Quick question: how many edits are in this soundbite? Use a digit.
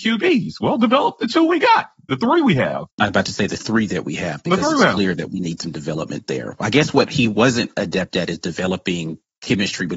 1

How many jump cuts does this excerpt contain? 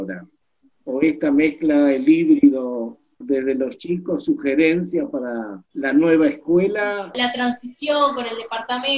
2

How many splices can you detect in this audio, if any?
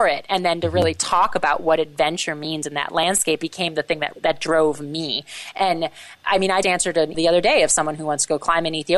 3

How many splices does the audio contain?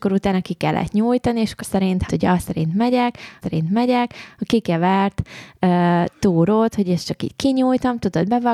3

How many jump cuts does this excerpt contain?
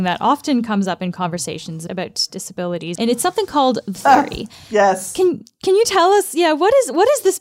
3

